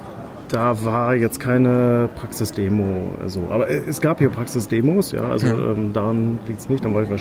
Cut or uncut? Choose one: uncut